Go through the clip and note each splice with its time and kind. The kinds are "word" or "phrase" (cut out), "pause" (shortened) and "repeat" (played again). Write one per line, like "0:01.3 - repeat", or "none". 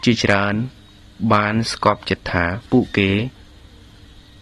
0:02.7 - pause